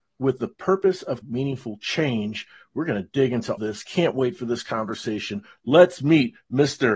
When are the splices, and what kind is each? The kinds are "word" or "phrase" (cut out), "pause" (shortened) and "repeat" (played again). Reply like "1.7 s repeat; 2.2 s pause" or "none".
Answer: 1.2 s word; 3.6 s word